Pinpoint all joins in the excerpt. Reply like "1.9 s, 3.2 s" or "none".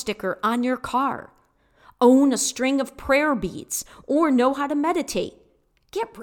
none